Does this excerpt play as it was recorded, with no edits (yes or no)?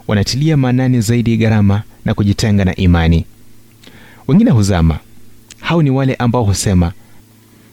yes